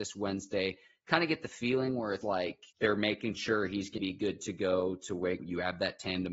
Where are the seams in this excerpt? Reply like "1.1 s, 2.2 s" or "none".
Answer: 2.2 s, 2.7 s, 4.0 s, 5.4 s